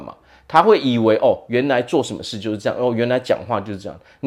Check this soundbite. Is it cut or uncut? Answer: uncut